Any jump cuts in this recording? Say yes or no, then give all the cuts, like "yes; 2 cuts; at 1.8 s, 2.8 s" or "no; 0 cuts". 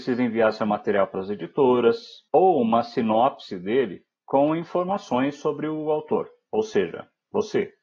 yes; 2 cuts; at 2.3 s, 4.1 s